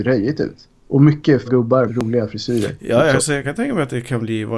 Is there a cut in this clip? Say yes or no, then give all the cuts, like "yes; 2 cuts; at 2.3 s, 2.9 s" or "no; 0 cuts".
yes; 3 cuts; at 1.5 s, 1.9 s, 3.4 s